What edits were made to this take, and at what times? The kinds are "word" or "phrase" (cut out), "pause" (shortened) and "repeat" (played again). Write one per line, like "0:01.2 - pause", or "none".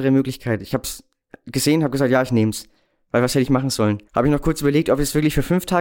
0:04.1 - pause